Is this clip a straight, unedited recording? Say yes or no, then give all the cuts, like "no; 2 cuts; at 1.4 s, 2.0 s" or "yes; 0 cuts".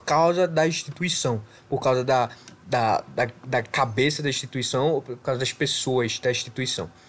yes; 0 cuts